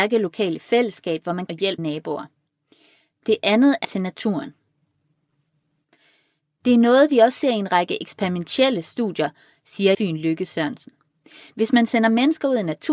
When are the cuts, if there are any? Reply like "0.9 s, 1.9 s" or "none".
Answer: 1.5 s, 1.8 s, 3.8 s, 9.9 s